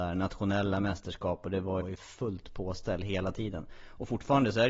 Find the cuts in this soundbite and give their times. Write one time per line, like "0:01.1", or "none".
0:01.8